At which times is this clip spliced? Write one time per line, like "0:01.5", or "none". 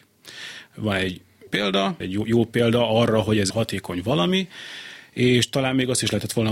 0:01.5
0:02.0
0:03.5